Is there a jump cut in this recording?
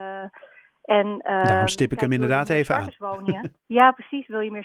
yes; 1 cut; at 3.6 s

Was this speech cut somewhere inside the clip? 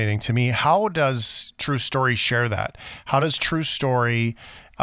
no; 0 cuts

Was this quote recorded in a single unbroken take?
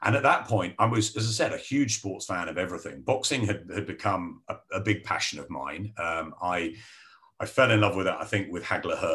yes; 0 cuts

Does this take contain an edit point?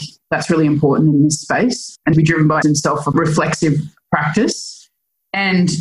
yes; 2 cuts; at 2.1 s, 2.6 s

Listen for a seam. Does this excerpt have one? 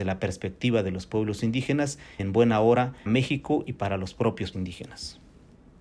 yes; 3 cuts; at 2.2 s, 3.1 s, 4.5 s

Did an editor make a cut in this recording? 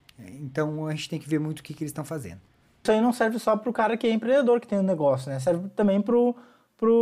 no; 0 cuts

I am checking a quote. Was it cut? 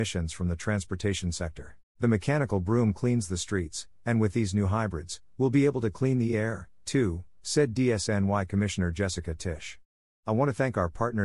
yes; 1 cut; at 1.9 s

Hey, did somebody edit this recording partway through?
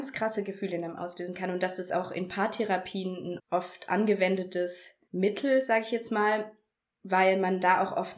yes; 3 cuts; at 1.9 s, 3.4 s, 5.1 s

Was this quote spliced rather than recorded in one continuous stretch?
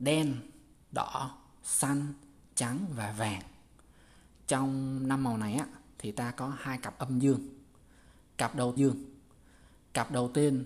yes; 1 cut; at 8.8 s

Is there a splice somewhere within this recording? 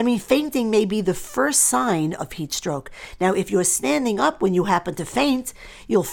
no; 0 cuts

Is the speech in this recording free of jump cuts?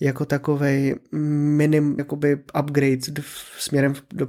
no; 1 cut; at 2.0 s

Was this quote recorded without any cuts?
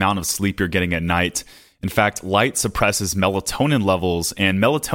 yes; 0 cuts

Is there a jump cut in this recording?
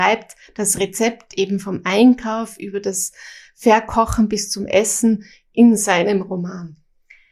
no; 0 cuts

